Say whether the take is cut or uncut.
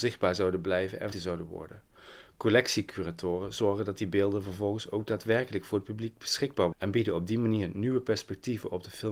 cut